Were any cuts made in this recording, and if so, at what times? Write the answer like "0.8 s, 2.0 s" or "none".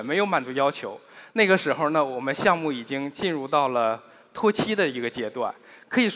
none